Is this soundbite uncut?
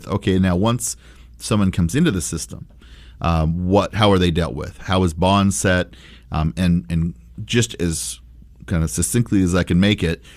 yes; 0 cuts

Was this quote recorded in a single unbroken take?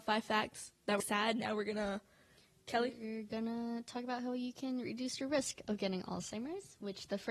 no; 1 cut; at 1.0 s

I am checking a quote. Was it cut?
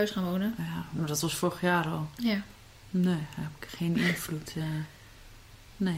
no; 0 cuts

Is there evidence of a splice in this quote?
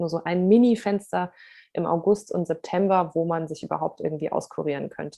no; 0 cuts

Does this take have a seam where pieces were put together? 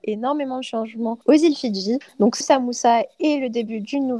yes; 3 cuts; at 1.2 s, 2.1 s, 2.4 s

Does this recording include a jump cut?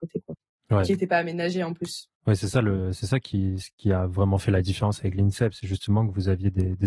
yes; 1 cut; at 2.2 s

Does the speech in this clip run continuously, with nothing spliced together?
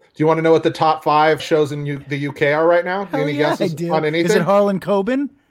no; 1 cut; at 1.4 s

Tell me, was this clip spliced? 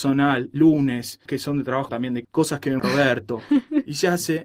yes; 4 cuts; at 1.3 s, 1.9 s, 2.2 s, 2.8 s

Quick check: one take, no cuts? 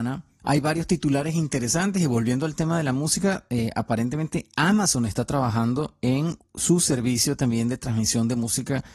yes; 0 cuts

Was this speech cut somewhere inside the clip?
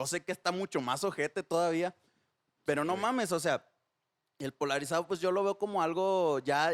no; 0 cuts

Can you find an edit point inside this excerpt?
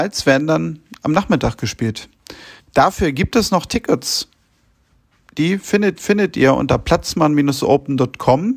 yes; 2 cuts; at 2.6 s, 6.0 s

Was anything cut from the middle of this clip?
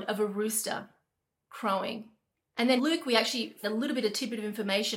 yes; 3 cuts; at 2.3 s, 2.8 s, 3.6 s

